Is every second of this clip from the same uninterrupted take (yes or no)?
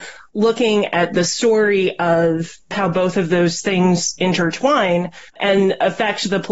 no